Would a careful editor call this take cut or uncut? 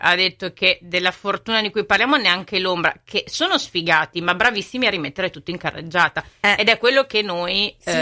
uncut